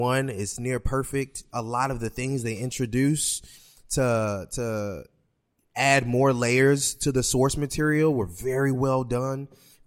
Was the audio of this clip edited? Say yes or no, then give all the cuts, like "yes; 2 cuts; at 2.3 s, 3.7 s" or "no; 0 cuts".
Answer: no; 0 cuts